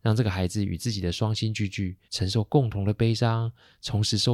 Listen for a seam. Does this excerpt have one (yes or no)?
yes